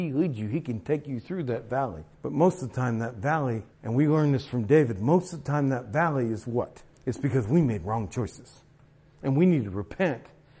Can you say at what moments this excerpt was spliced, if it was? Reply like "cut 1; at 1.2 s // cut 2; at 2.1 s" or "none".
cut 1; at 2.1 s // cut 2; at 3.7 s // cut 3; at 6.9 s // cut 4; at 8.9 s